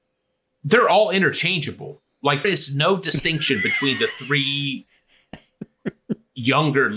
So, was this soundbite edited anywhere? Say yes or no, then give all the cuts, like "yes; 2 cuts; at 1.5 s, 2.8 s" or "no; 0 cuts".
yes; 1 cut; at 2.4 s